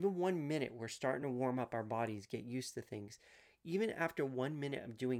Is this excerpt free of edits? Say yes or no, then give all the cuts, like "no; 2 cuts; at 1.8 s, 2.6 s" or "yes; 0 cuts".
yes; 0 cuts